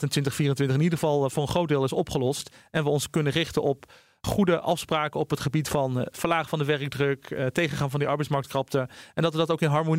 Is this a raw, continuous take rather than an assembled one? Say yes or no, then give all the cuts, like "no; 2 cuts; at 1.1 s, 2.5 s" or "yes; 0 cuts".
yes; 0 cuts